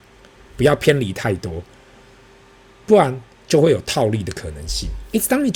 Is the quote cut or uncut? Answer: uncut